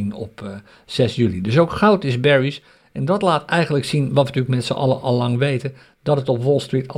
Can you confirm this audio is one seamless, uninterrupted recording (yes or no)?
yes